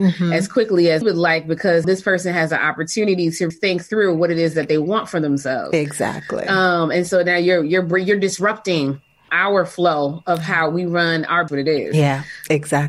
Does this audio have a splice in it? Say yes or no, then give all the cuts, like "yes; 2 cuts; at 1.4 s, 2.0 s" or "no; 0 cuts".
yes; 5 cuts; at 1.0 s, 1.8 s, 3.5 s, 9.1 s, 11.5 s